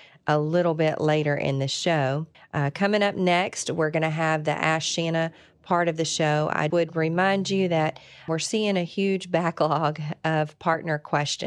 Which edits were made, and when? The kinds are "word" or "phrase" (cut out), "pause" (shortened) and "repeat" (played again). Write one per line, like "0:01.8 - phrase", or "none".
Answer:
0:02.3 - pause
0:06.7 - word
0:08.3 - word